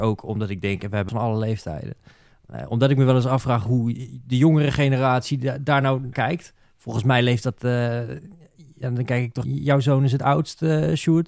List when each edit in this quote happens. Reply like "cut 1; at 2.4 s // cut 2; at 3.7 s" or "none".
cut 1; at 1.1 s // cut 2; at 6.1 s // cut 3; at 9.4 s